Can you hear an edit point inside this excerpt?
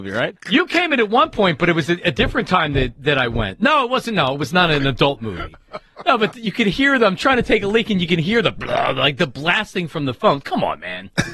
no; 0 cuts

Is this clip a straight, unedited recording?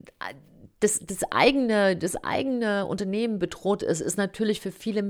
yes; 0 cuts

